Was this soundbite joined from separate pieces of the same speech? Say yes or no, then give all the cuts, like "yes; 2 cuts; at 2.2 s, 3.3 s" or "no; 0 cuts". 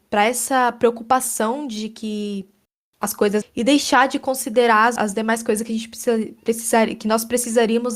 yes; 2 cuts; at 3.4 s, 5.0 s